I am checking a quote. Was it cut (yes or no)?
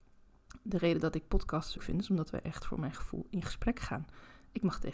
yes